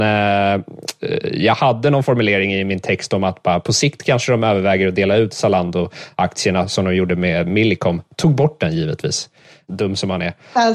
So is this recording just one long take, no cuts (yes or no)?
yes